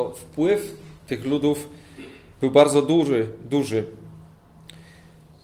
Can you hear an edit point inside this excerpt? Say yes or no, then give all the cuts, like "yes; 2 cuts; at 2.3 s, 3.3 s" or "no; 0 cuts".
yes; 1 cut; at 1.0 s